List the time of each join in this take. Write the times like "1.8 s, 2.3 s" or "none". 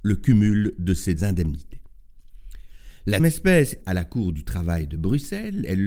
1.2 s, 3.2 s, 3.8 s

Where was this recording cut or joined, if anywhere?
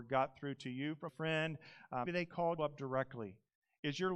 1.1 s, 2.1 s, 2.6 s

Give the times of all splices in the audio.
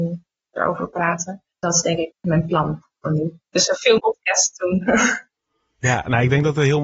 1.5 s, 2.1 s, 3.4 s, 4.0 s

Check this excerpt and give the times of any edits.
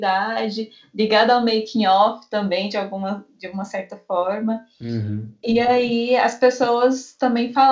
none

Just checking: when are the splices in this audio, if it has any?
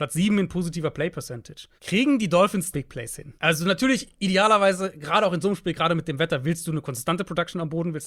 1.8 s, 2.7 s, 3.4 s

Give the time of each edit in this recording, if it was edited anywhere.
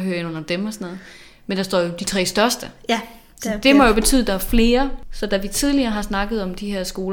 none

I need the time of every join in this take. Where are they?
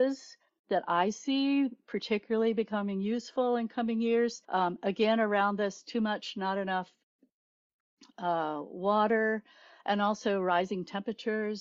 4.4 s

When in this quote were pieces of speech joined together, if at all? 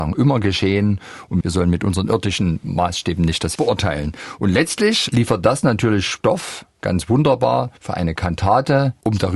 3.5 s, 7.8 s

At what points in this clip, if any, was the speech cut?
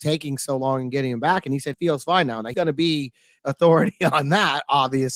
1.7 s, 2.5 s, 3.4 s

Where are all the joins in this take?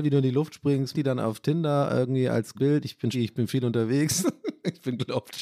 0.9 s, 2.5 s, 3.1 s

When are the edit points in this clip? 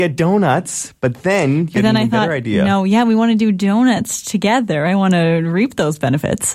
none

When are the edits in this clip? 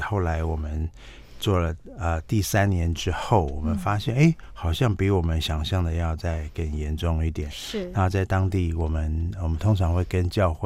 none

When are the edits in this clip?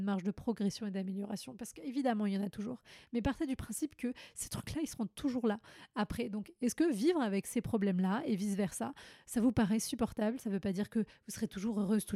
none

